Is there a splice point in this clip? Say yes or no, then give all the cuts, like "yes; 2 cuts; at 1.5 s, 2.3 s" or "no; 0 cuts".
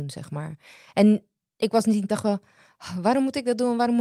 yes; 1 cut; at 2.1 s